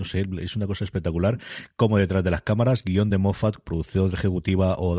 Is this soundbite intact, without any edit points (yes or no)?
yes